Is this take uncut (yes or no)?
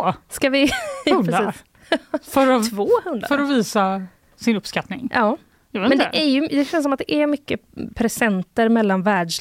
yes